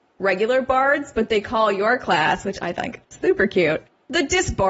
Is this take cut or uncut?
uncut